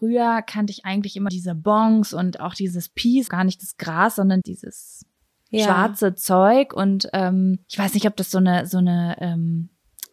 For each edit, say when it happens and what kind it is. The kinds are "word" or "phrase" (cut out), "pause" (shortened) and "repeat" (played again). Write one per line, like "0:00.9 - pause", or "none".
0:01.3 - word
0:03.3 - word
0:04.4 - word
0:07.6 - pause